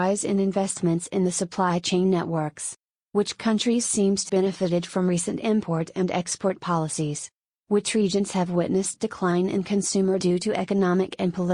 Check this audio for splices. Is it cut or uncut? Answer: cut